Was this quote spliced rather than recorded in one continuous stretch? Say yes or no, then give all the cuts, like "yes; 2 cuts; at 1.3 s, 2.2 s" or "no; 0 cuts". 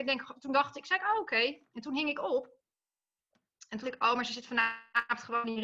yes; 1 cut; at 3.8 s